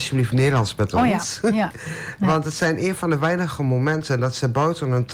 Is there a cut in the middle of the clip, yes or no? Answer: no